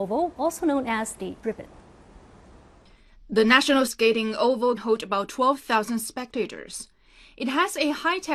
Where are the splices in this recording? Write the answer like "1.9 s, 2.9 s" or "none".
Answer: 1.4 s, 3.9 s, 4.8 s